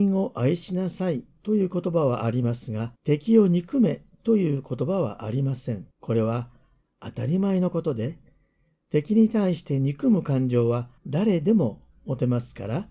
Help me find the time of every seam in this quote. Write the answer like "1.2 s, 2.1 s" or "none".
3.0 s, 5.9 s, 11.0 s